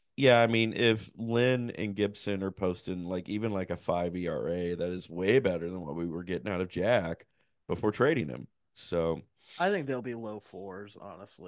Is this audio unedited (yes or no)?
yes